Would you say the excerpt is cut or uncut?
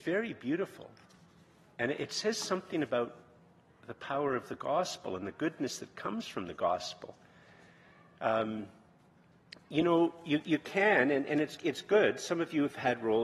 uncut